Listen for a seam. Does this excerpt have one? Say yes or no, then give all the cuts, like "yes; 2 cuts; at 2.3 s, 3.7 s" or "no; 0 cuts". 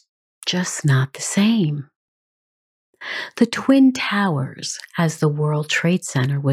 no; 0 cuts